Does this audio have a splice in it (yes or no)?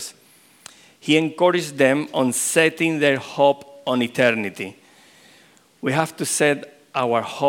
no